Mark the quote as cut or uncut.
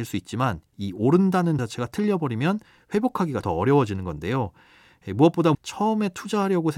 cut